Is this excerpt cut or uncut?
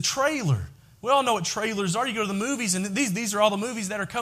uncut